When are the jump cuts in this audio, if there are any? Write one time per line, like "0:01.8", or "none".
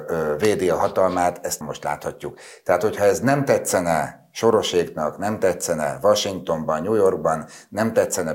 0:01.6